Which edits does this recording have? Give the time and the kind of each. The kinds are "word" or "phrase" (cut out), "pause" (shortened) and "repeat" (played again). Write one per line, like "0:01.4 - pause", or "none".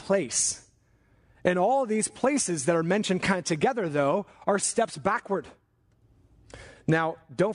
none